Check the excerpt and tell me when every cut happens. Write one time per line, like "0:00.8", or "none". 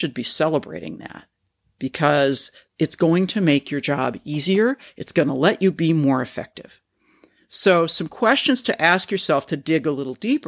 none